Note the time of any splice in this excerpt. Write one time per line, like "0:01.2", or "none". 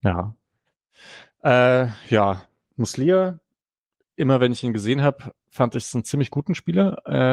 none